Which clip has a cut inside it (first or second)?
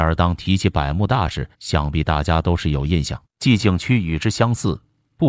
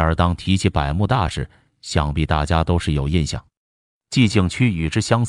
first